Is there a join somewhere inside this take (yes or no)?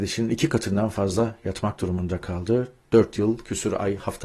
no